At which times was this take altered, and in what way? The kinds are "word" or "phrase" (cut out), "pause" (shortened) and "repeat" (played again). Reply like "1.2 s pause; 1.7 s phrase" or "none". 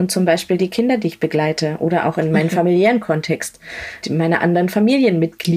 4.0 s word

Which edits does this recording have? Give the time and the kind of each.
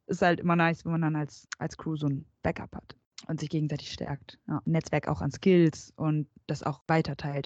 none

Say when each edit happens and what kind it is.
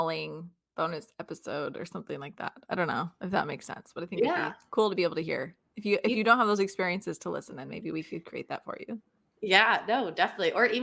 none

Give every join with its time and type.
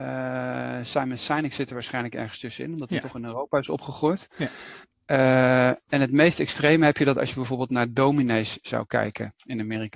5.9 s word

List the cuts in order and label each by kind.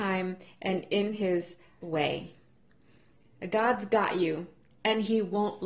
1.8 s word

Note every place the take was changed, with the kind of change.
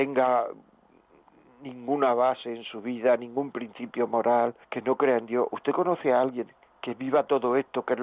4.6 s pause; 6.6 s pause

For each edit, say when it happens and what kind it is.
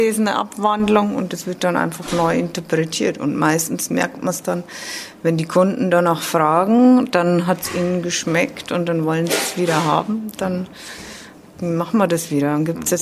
none

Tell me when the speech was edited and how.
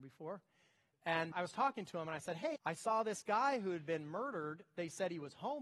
1.3 s word; 2.6 s word

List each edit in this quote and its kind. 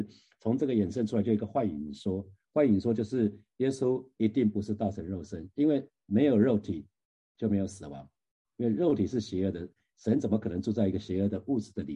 none

